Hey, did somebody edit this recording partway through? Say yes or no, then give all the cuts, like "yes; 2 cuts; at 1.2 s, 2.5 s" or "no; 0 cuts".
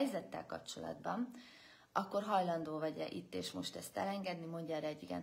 no; 0 cuts